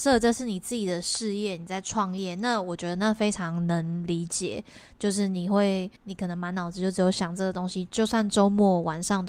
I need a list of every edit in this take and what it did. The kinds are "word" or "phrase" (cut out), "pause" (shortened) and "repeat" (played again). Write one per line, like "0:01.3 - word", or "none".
0:06.0 - pause